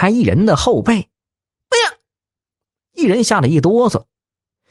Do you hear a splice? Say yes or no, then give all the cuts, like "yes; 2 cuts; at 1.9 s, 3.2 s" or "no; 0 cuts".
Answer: no; 0 cuts